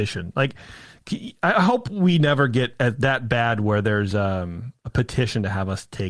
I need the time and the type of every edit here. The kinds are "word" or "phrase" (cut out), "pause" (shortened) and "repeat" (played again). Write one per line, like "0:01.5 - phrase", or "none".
none